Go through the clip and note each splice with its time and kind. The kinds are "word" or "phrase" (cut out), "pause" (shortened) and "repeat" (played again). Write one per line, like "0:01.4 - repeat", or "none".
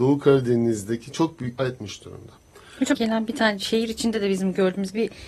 0:01.6 - phrase
0:02.9 - word